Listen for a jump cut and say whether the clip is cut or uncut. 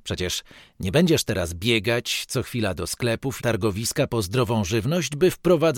cut